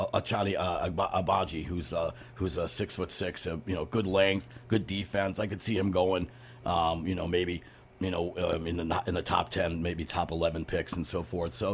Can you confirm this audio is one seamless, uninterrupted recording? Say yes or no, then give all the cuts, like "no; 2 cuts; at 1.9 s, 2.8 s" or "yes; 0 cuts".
yes; 0 cuts